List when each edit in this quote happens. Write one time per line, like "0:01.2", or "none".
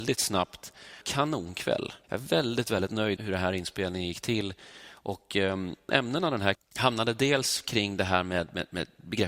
0:01.0
0:02.0
0:03.2
0:05.9
0:06.5